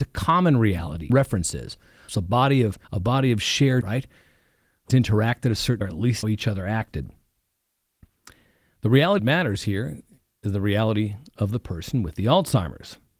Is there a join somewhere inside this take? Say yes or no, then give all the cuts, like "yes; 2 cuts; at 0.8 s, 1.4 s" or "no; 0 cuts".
yes; 8 cuts; at 1.1 s, 2.1 s, 2.8 s, 3.8 s, 4.9 s, 5.8 s, 6.2 s, 9.2 s